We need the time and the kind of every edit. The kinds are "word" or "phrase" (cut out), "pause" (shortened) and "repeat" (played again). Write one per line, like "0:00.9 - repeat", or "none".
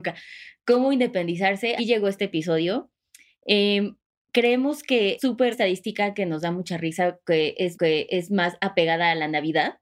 0:01.8 - word
0:05.2 - word
0:05.5 - phrase
0:07.7 - repeat